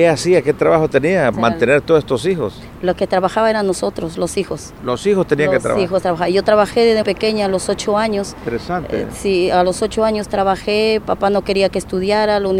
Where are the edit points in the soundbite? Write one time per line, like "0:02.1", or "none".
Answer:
0:01.3
0:07.0